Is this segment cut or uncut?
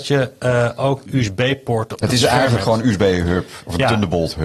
cut